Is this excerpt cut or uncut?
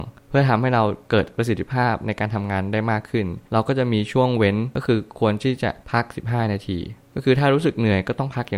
cut